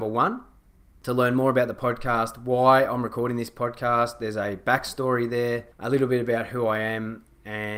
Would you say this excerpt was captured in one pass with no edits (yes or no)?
no